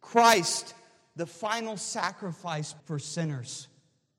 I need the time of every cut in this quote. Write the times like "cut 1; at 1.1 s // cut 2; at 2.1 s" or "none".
cut 1; at 2.8 s

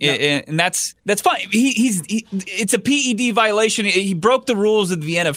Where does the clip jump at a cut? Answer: cut 1; at 1.0 s

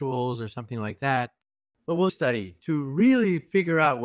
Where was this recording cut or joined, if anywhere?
cut 1; at 2.1 s

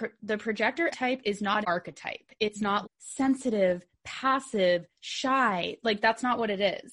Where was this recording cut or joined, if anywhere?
cut 1; at 0.9 s // cut 2; at 1.6 s // cut 3; at 2.8 s

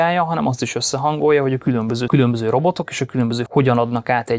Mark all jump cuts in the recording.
cut 1; at 2.1 s // cut 2; at 3.5 s

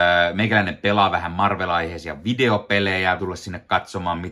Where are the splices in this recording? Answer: cut 1; at 3.2 s

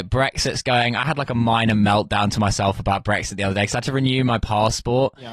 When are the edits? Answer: none

